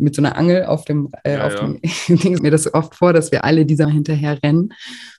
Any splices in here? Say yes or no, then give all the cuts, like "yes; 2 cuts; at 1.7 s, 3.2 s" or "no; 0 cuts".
yes; 3 cuts; at 2.4 s, 3.4 s, 3.8 s